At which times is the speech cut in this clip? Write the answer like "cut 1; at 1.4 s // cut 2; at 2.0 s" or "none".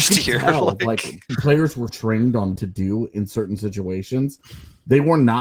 cut 1; at 1.3 s // cut 2; at 1.9 s // cut 3; at 2.6 s